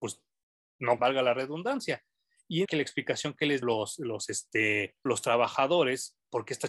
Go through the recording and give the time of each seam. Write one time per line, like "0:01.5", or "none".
0:01.0
0:02.6
0:03.6
0:05.1